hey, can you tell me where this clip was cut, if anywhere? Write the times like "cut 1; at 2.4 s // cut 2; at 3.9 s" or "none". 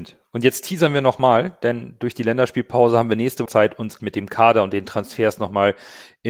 cut 1; at 3.5 s // cut 2; at 4.0 s